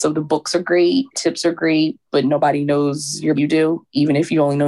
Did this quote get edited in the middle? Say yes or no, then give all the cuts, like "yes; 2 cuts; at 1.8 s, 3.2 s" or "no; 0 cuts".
yes; 3 cuts; at 1.1 s, 2.1 s, 3.3 s